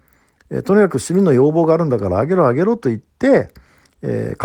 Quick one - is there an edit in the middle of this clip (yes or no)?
yes